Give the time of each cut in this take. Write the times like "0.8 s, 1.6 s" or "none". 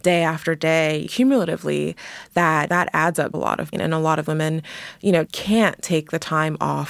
1.1 s, 2.7 s, 3.3 s, 3.7 s, 4.3 s, 5.3 s